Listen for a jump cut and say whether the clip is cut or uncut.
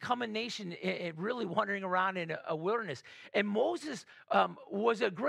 uncut